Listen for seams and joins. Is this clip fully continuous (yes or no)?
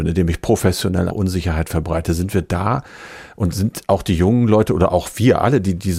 no